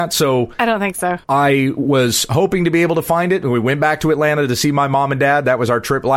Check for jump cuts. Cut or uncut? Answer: cut